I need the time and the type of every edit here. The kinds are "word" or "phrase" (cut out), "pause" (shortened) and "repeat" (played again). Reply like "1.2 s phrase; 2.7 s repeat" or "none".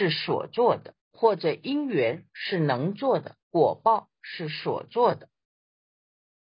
1.0 s pause; 3.4 s pause